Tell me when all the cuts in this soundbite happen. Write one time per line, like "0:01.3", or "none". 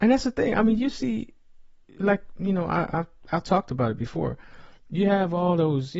0:04.8